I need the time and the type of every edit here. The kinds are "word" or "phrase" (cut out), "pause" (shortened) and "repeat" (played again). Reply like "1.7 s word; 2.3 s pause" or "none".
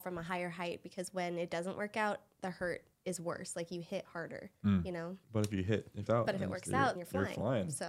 2.9 s pause; 4.6 s pause; 5.2 s pause; 6.1 s phrase; 7.0 s word